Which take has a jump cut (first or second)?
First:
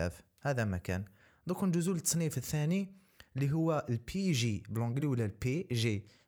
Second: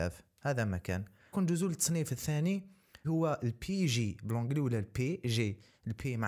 second